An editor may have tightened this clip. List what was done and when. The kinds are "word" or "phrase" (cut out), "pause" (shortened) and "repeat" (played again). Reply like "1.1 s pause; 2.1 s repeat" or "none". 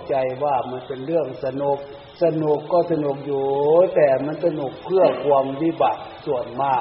2.2 s pause